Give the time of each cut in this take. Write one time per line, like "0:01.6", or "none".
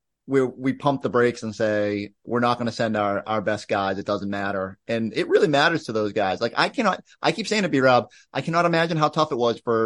none